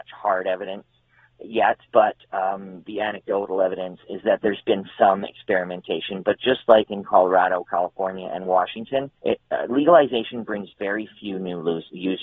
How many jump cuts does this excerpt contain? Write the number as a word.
two